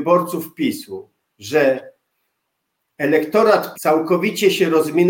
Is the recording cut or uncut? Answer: cut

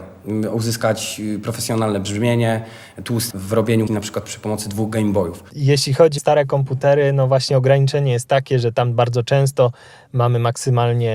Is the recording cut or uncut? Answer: cut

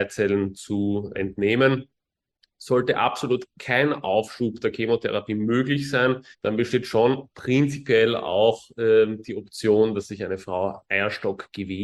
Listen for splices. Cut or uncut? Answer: cut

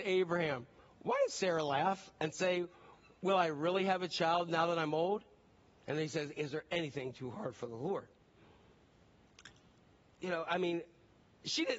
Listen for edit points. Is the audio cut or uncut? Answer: uncut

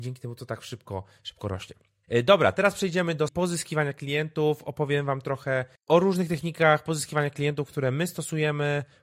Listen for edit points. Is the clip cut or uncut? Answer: cut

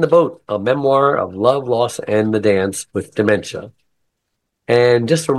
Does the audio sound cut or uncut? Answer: cut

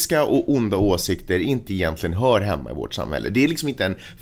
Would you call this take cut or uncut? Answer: cut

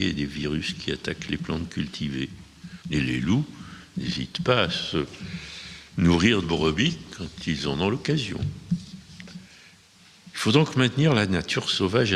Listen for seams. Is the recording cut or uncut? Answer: cut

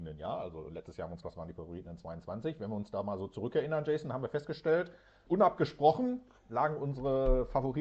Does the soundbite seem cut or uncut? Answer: cut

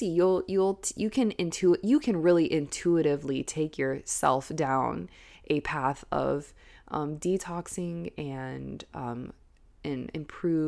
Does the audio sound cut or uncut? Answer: uncut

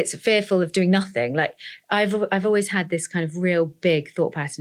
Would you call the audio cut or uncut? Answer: uncut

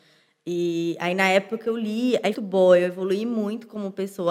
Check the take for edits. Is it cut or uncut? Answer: cut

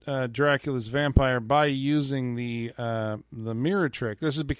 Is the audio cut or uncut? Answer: uncut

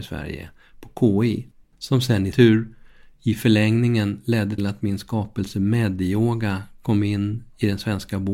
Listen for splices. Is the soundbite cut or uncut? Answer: cut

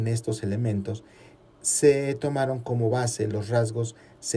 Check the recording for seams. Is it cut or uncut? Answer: uncut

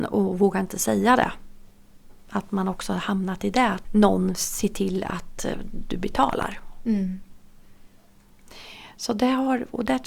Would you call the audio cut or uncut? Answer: cut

